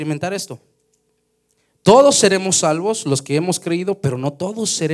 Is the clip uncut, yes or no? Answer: yes